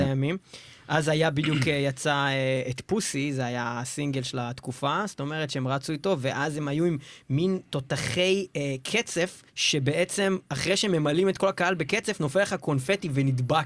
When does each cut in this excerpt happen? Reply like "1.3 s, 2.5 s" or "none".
9.5 s